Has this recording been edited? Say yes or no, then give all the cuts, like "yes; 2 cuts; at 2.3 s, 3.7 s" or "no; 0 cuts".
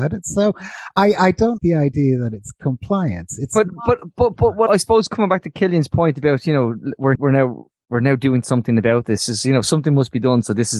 yes; 3 cuts; at 1.6 s, 4.7 s, 7.1 s